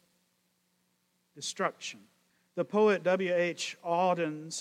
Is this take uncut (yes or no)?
no